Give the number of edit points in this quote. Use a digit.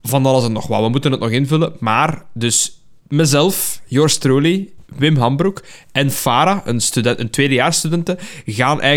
0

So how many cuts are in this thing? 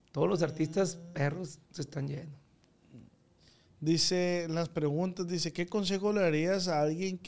1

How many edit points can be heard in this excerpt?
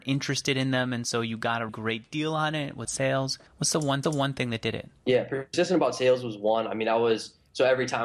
5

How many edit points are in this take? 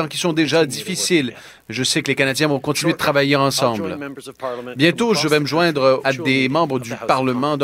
1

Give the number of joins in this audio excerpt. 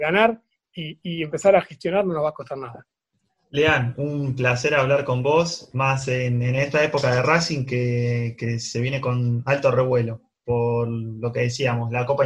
1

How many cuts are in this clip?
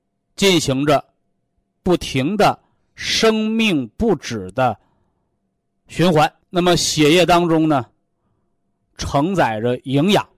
1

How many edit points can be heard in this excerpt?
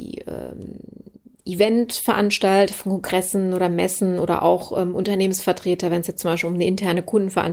0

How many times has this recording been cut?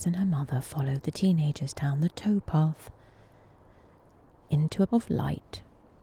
1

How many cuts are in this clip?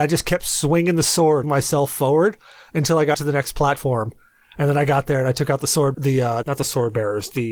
4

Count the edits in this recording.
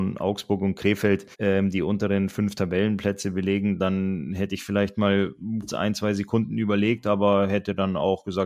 2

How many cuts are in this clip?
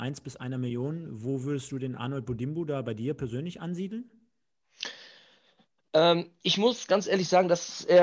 0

